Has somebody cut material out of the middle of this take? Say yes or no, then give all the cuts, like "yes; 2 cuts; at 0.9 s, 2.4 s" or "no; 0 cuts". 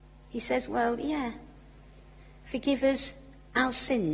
no; 0 cuts